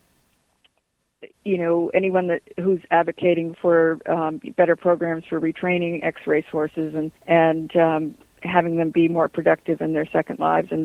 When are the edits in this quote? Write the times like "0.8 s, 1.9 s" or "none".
1.3 s, 7.2 s